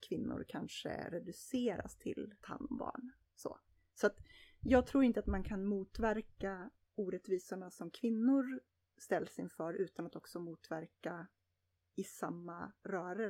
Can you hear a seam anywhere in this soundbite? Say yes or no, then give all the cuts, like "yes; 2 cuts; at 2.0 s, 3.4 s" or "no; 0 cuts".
no; 0 cuts